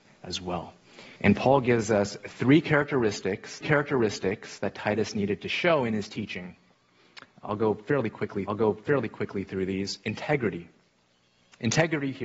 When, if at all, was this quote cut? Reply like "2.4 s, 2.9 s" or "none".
1.2 s, 3.6 s, 8.5 s